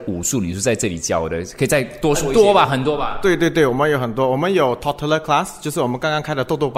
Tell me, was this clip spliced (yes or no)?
no